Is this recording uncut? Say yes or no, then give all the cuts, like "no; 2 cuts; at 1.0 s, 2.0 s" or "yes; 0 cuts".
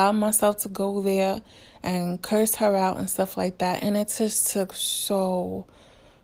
yes; 0 cuts